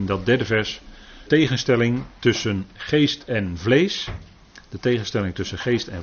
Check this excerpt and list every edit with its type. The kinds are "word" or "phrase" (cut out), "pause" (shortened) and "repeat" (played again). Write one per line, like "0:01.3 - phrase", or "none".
0:01.3 - word

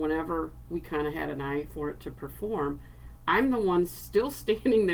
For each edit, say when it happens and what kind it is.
none

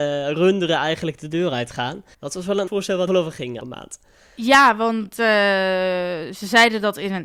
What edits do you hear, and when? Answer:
0:02.1 - pause
0:02.7 - word
0:03.1 - word
0:03.6 - word

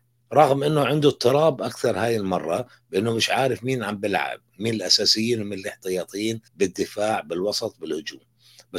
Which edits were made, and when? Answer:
0:06.5 - pause

